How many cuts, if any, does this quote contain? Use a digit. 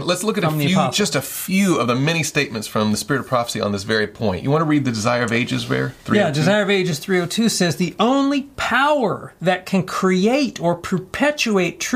0